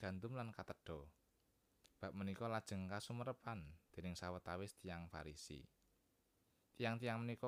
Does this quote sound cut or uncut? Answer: uncut